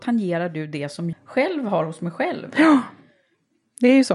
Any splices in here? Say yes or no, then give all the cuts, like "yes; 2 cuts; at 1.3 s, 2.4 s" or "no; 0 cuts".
yes; 1 cut; at 1.1 s